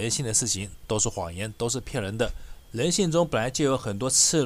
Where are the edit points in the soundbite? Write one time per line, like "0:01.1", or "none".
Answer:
0:02.6